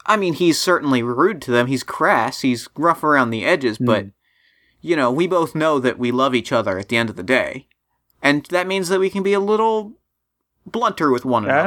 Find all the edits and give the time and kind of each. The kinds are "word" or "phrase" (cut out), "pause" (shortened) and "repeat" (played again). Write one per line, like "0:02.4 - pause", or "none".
none